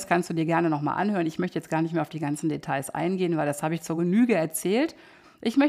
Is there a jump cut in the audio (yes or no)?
no